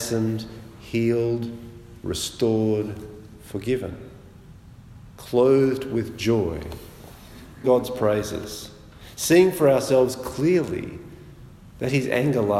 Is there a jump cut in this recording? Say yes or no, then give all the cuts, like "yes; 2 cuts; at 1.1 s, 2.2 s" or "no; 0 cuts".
yes; 1 cut; at 7.6 s